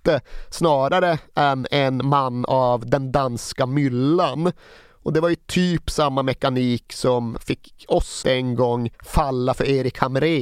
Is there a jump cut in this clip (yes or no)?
yes